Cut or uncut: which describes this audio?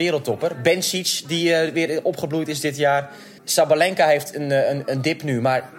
cut